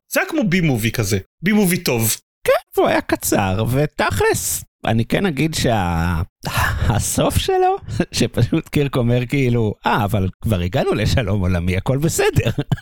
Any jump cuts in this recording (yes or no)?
yes